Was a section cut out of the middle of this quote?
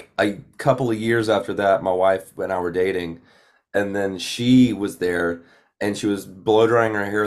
no; 0 cuts

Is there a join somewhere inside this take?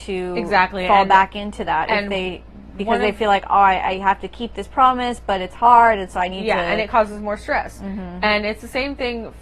no; 0 cuts

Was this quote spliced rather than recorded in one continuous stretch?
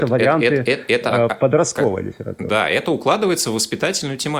no; 0 cuts

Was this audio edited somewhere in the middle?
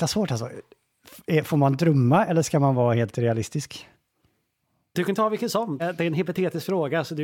yes; 1 cut; at 5.8 s

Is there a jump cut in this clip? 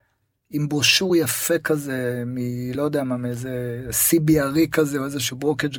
no; 0 cuts

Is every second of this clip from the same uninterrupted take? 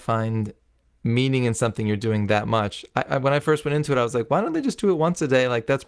yes; 0 cuts

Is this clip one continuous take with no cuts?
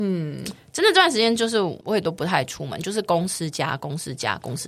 no; 1 cut; at 1.8 s

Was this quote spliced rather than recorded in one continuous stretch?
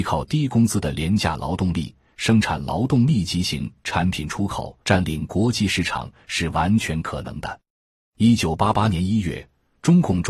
yes; 1 cut; at 4.8 s

